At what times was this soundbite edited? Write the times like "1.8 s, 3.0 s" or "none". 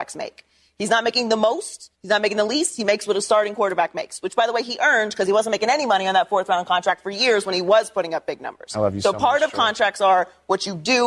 1.9 s